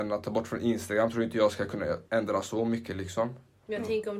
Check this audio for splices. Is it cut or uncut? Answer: cut